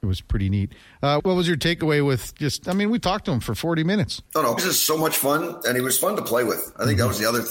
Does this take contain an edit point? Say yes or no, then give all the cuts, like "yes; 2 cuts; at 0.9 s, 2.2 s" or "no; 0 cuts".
yes; 3 cuts; at 1.2 s, 4.3 s, 4.6 s